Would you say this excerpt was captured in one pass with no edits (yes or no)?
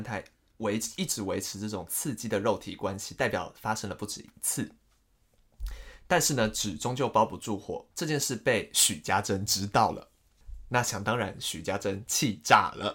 no